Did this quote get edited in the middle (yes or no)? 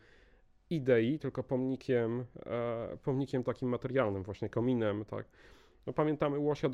no